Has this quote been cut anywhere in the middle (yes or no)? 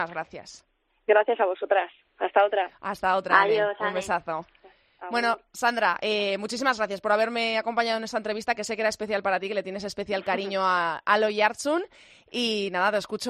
no